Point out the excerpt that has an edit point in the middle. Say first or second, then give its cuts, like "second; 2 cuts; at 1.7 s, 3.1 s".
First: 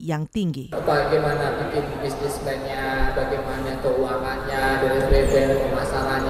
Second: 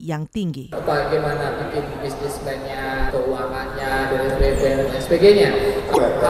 second; 2 cuts; at 3.1 s, 4.9 s